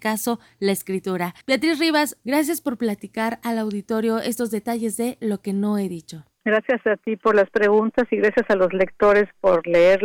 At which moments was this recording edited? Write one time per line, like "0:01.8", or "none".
0:01.4